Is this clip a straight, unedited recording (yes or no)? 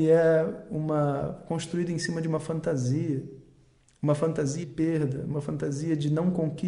no